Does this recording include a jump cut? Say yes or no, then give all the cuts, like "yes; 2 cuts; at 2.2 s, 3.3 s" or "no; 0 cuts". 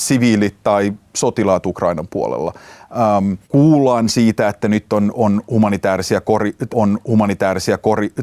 yes; 2 cuts; at 3.4 s, 6.7 s